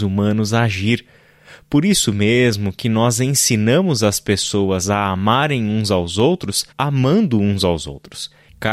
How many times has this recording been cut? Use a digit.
1